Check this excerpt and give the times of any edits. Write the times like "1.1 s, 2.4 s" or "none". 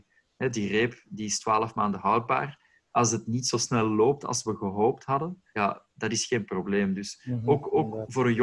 5.5 s

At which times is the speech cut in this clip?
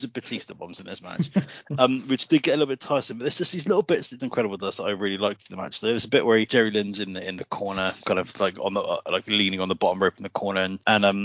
4.2 s

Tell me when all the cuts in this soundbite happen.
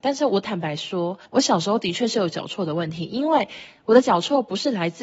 1.3 s

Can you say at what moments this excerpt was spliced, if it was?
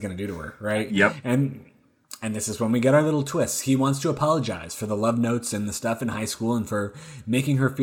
none

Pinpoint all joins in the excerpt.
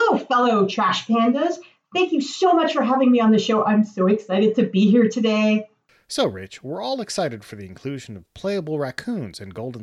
none

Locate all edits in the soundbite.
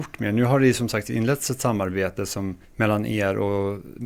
2.6 s

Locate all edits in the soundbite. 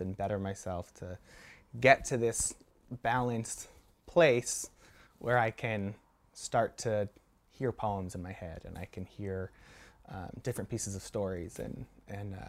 none

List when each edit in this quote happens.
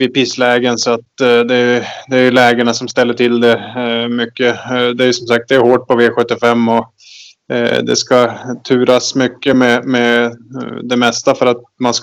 none

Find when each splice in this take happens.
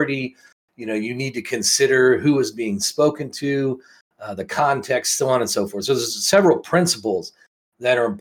none

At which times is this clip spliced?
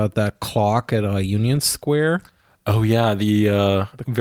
none

